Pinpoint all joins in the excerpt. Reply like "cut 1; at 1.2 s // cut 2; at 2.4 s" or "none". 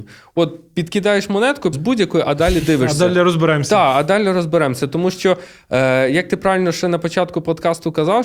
cut 1; at 1.7 s